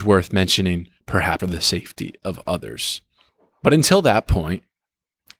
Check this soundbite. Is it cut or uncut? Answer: cut